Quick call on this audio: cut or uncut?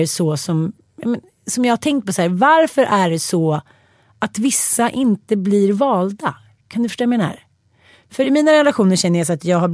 uncut